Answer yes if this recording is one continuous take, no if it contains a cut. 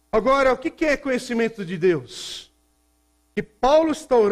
yes